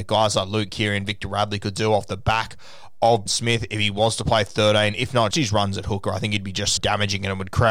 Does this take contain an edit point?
yes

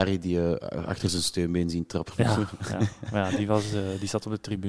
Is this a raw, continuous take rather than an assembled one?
yes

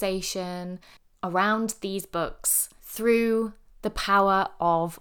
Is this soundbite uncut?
no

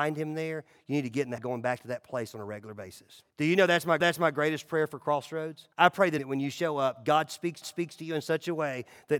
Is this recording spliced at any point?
yes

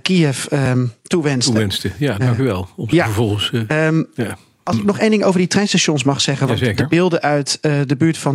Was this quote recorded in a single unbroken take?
yes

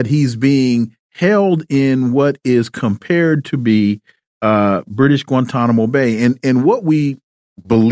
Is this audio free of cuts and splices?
yes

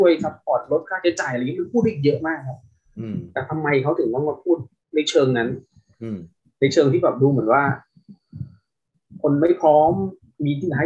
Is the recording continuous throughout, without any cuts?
yes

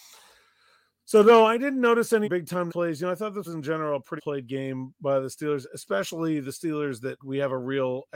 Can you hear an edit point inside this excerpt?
yes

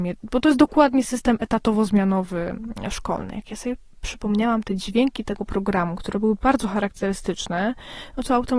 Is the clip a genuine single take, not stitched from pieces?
yes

